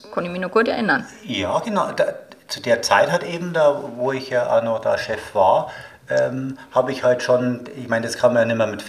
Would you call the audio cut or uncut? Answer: uncut